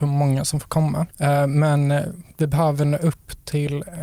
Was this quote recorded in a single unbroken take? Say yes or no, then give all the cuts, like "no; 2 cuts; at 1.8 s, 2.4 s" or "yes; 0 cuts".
yes; 0 cuts